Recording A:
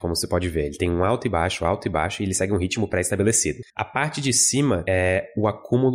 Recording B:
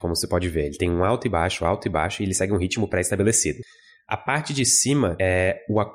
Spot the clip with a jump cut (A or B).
A